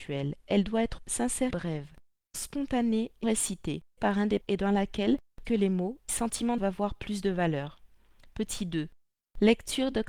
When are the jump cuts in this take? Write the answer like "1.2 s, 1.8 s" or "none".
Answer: 1.0 s, 1.5 s, 2.3 s, 3.2 s, 4.0 s, 4.4 s, 5.4 s, 6.1 s, 6.6 s